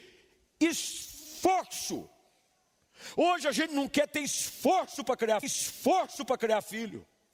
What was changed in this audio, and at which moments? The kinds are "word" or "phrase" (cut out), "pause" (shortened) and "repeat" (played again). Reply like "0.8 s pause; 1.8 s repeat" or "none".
5.4 s repeat